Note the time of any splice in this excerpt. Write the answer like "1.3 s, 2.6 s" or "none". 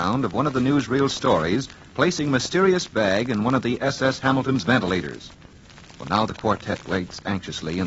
none